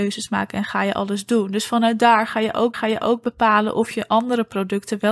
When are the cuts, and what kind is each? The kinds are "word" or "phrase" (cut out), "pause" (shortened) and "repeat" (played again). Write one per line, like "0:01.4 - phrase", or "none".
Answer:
0:02.7 - repeat